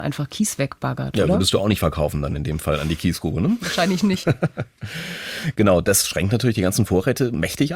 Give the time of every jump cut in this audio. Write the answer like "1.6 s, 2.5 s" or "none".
none